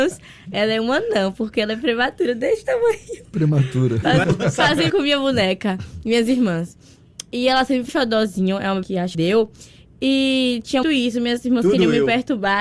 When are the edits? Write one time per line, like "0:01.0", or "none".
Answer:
0:04.2
0:04.9
0:07.9
0:08.8
0:09.1
0:10.8